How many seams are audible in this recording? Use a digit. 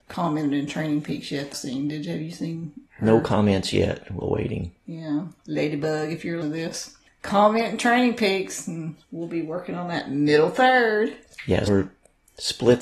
7